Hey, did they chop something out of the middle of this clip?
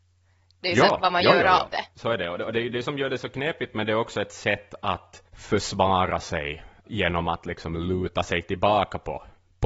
yes; 1 cut; at 5.3 s

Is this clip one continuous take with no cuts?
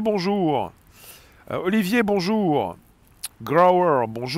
yes; 0 cuts

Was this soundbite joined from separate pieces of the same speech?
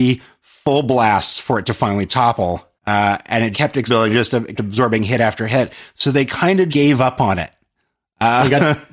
yes; 5 cuts; at 2.7 s, 3.5 s, 3.9 s, 4.5 s, 6.7 s

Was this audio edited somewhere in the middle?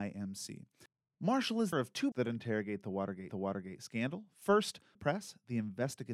yes; 4 cuts; at 1.7 s, 2.1 s, 3.3 s, 4.9 s

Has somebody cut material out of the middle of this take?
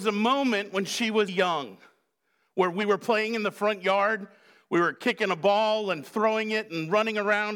yes; 1 cut; at 1.3 s

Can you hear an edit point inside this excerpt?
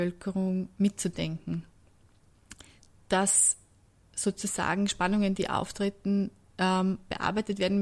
no; 0 cuts

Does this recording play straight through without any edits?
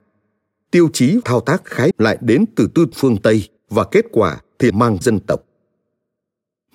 no; 6 cuts; at 1.2 s, 1.9 s, 2.9 s, 3.6 s, 4.7 s, 5.0 s

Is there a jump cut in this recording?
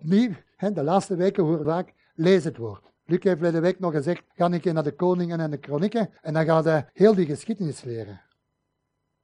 yes; 5 cuts; at 1.6 s, 3.0 s, 4.3 s, 6.2 s, 6.9 s

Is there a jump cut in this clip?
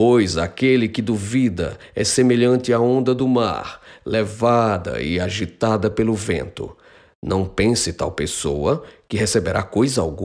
no; 0 cuts

